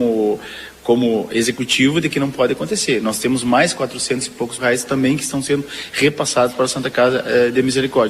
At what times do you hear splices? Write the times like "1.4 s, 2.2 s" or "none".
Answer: 4.6 s

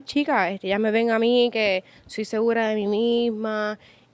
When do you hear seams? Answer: none

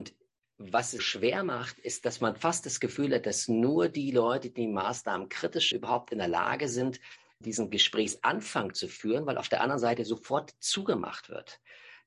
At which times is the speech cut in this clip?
1.0 s, 5.7 s

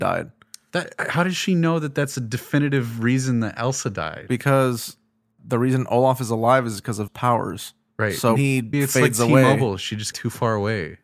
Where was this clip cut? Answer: 5.4 s, 7.1 s, 8.4 s, 8.7 s, 10.1 s

